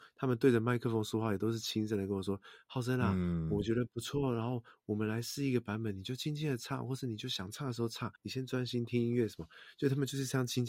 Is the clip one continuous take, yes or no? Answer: no